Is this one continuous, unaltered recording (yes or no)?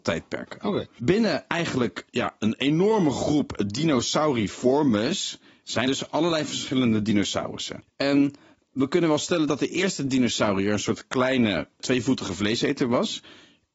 no